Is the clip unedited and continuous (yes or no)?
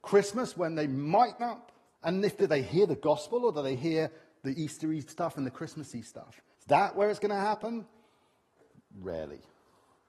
no